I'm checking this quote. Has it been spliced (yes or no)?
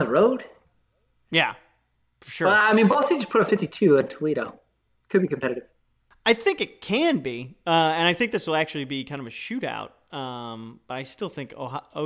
no